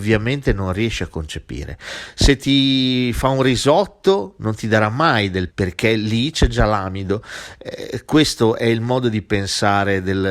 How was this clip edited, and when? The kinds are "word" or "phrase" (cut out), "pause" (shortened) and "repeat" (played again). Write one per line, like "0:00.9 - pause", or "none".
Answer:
0:05.5 - word